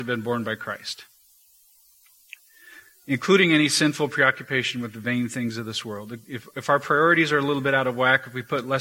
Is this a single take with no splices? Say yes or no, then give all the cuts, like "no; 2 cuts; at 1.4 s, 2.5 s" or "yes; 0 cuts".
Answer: yes; 0 cuts